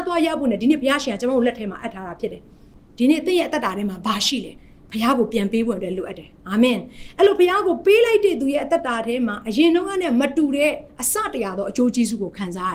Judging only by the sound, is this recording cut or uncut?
cut